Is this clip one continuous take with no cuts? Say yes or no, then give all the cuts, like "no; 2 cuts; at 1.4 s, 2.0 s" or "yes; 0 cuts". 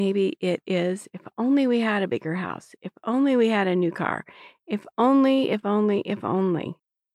yes; 0 cuts